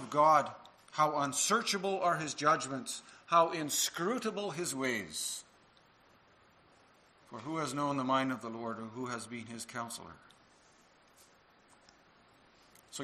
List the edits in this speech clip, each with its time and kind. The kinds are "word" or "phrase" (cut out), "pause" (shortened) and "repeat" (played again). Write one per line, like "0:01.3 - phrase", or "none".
none